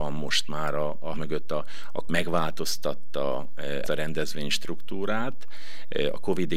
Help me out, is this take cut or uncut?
cut